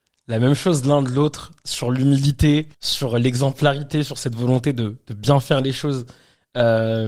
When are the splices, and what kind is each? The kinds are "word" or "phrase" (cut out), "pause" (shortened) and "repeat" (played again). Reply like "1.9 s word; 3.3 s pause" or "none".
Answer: 2.7 s pause